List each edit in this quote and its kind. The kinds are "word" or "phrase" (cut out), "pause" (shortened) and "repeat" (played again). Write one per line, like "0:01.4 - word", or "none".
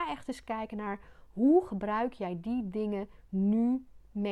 none